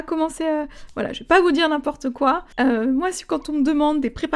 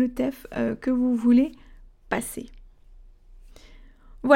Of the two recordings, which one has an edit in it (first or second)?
first